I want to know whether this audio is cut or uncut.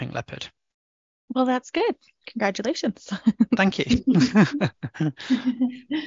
uncut